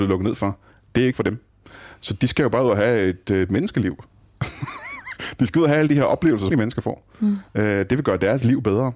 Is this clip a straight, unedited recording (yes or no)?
no